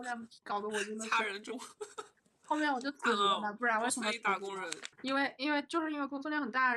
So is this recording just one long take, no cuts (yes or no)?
no